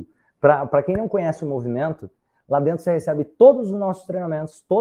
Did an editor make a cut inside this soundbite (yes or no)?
no